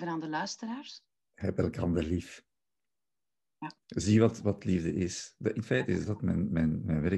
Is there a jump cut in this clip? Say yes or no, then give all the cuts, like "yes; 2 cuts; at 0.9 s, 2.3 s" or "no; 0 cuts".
yes; 1 cut; at 3.8 s